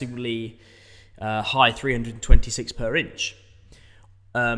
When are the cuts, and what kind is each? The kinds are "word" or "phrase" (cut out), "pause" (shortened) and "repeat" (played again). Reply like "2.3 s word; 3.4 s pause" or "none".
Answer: 2.7 s word